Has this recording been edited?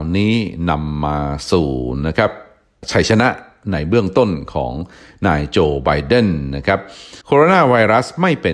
yes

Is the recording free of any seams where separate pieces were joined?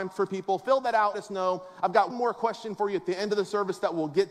no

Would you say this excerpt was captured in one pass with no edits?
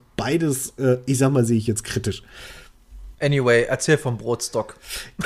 no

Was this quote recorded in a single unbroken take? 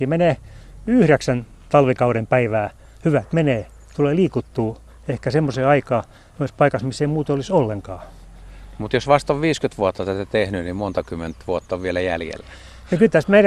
yes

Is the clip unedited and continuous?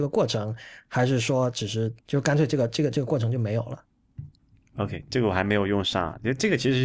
no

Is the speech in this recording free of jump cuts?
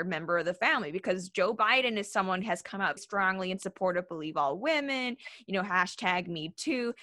no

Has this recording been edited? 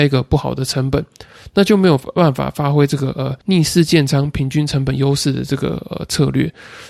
yes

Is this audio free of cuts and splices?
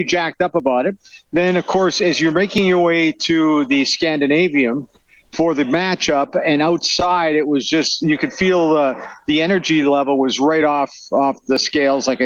yes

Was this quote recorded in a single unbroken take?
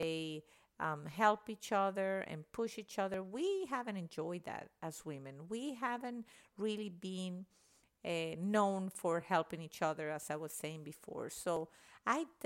yes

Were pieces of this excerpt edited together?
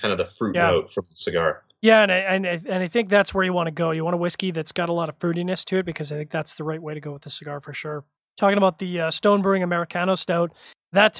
no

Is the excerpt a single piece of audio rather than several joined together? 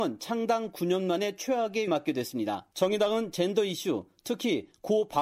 no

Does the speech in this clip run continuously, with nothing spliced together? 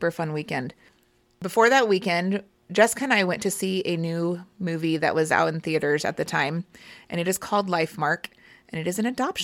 yes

